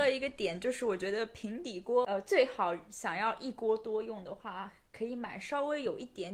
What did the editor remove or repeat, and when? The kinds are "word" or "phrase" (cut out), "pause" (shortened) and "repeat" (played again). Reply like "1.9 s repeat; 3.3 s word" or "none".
none